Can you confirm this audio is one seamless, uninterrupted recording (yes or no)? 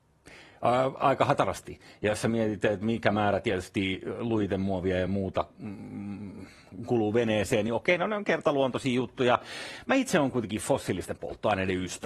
yes